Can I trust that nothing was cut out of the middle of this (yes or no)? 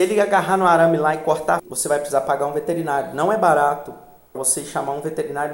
no